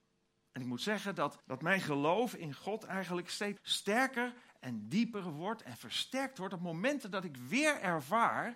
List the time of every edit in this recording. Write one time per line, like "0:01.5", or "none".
0:01.4
0:03.6